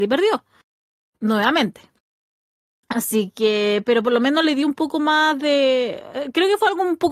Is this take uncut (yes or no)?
yes